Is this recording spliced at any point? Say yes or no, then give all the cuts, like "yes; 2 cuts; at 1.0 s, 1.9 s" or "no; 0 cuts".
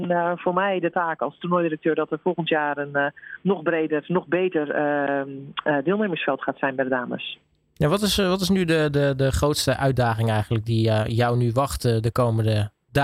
no; 0 cuts